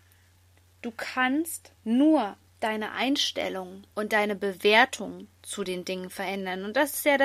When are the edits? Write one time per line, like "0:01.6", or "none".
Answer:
0:01.8
0:03.9